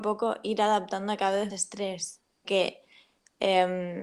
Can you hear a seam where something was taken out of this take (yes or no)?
yes